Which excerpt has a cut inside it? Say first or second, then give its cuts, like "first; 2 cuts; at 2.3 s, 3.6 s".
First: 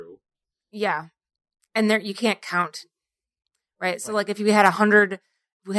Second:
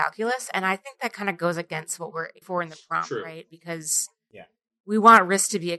second; 1 cut; at 2.4 s